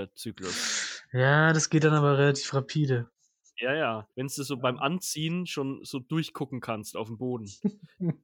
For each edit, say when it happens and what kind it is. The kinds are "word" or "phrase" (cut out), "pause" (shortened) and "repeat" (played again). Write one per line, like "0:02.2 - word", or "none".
0:04.1 - pause